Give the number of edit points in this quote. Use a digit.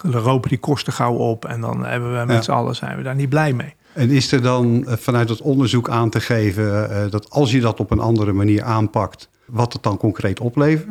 1